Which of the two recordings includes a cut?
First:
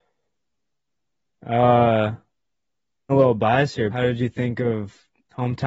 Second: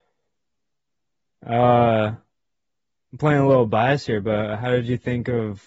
first; 2 cuts; at 3.1 s, 3.9 s

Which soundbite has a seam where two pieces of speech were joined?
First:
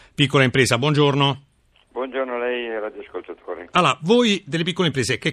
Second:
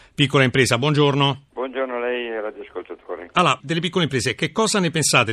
second; 2 cuts; at 1.5 s, 3.6 s

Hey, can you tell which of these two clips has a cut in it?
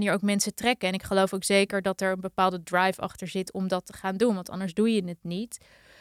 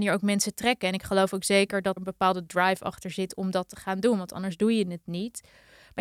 second; 1 cut; at 2.0 s

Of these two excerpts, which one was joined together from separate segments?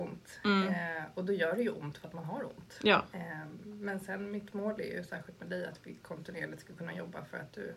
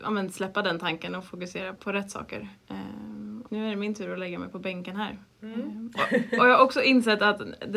second; 2 cuts; at 1.8 s, 3.5 s

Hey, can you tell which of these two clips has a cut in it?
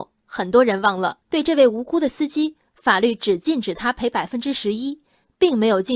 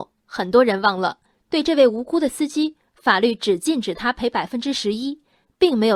first; 1 cut; at 1.2 s

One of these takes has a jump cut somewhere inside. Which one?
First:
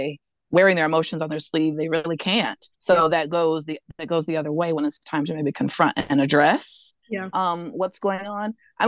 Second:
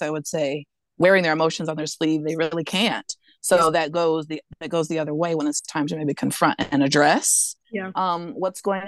first; 1 cut; at 2.7 s

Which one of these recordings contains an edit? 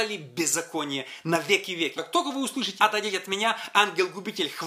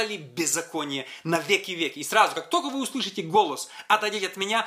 first; 2 cuts; at 2.0 s, 2.8 s

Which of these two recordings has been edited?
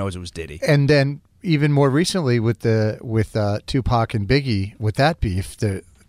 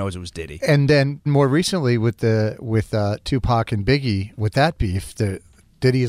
second; 1 cut; at 1.3 s

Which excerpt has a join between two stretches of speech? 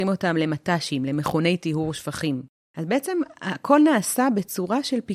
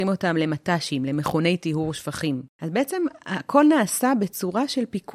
second; 1 cut; at 2.5 s

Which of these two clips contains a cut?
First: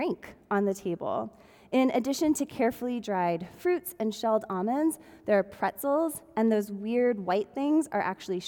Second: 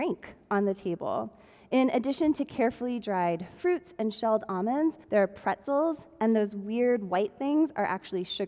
second; 1 cut; at 5.0 s

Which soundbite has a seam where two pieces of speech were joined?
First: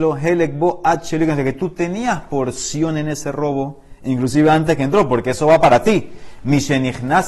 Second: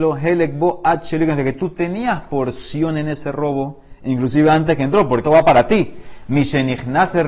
second; 1 cut; at 5.2 s

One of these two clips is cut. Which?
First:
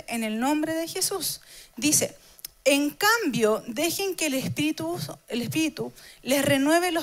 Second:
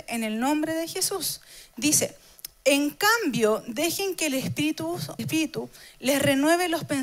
second; 1 cut; at 5.2 s

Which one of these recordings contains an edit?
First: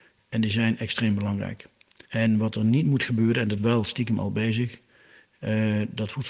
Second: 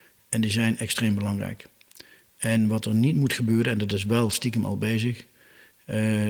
first; 2 cuts; at 2.1 s, 3.6 s

